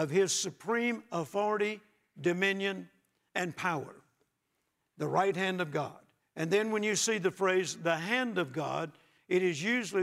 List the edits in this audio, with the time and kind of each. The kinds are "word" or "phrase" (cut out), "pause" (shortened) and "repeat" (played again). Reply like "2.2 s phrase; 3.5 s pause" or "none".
6.2 s pause